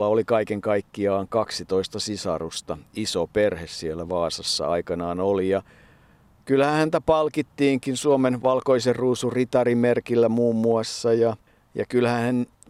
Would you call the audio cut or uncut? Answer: uncut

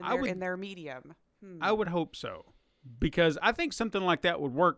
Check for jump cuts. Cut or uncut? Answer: uncut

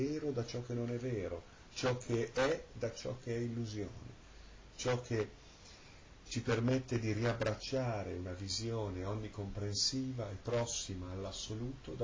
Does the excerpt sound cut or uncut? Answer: uncut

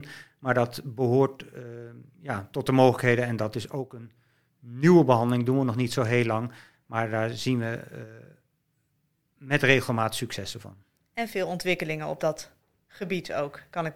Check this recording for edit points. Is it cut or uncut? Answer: uncut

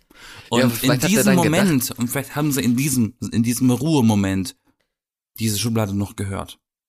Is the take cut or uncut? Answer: uncut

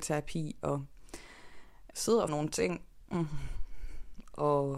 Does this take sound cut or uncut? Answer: cut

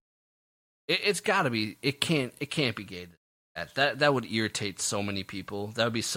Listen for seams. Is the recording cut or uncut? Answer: uncut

